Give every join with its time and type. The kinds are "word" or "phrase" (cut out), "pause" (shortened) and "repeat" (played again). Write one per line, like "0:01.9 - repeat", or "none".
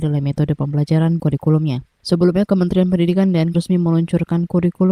0:01.2 - word
0:01.9 - pause
0:03.5 - word